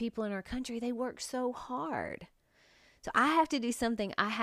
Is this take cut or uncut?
uncut